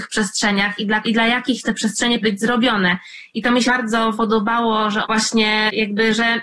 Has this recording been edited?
yes; 6 cuts; at 1.0 s, 1.6 s, 2.2 s, 3.7 s, 4.1 s, 5.0 s

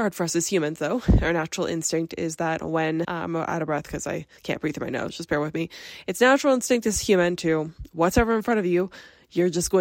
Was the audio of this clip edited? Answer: yes; 3 cuts; at 3.0 s, 4.4 s, 5.1 s

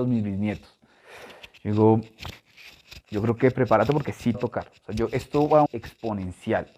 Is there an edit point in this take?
yes; 2 cuts; at 4.3 s, 5.7 s

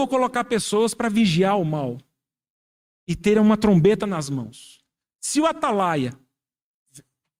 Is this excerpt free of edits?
yes; 0 cuts

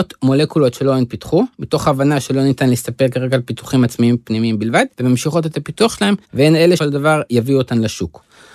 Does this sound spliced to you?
yes; 3 cuts; at 4.9 s, 6.2 s, 6.8 s

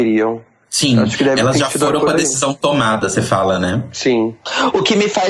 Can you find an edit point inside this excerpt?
no; 0 cuts

